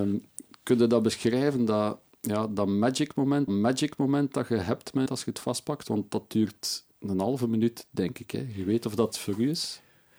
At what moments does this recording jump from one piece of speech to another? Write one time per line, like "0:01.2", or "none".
0:03.5
0:05.1
0:06.9
0:09.1